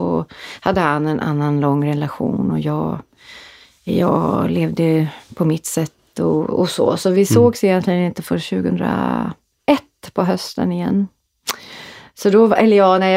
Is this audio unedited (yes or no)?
yes